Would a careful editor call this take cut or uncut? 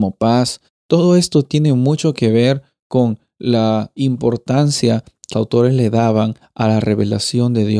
cut